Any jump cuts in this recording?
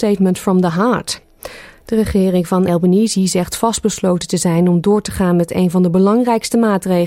yes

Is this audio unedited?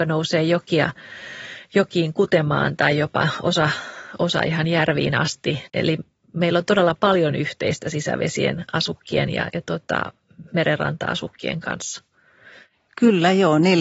yes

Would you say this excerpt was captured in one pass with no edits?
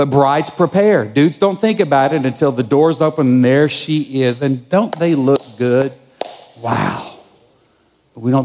yes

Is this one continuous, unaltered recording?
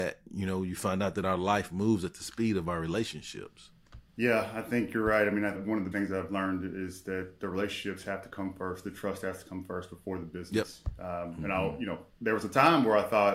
no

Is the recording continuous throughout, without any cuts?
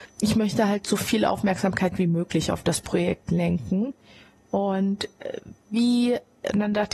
yes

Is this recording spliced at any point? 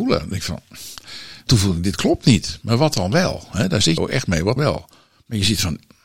yes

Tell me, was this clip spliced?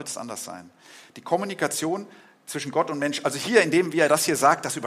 no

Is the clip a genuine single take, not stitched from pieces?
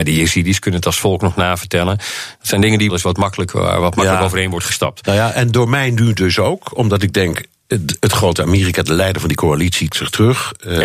no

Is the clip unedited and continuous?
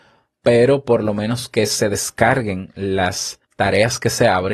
no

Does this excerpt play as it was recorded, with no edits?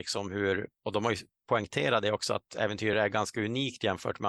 yes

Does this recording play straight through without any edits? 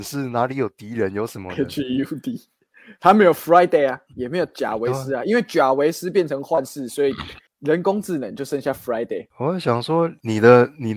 no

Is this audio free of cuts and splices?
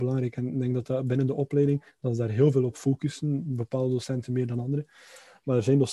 yes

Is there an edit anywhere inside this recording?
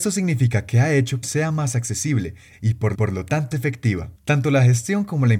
yes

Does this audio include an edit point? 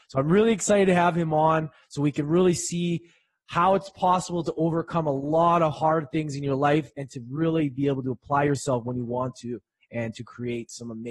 no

